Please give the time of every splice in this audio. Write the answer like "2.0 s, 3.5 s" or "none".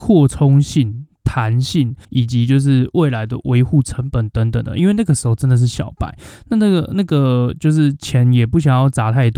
2.0 s